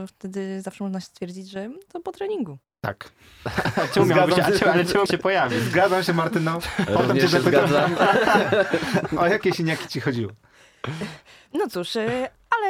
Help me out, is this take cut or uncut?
cut